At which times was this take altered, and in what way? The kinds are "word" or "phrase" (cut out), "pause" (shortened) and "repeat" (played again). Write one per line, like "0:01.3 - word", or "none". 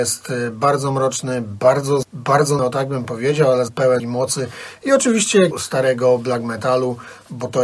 0:02.0 - word
0:02.6 - word
0:03.7 - word
0:04.0 - word
0:05.5 - word